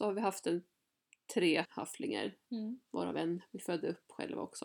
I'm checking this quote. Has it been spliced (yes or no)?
yes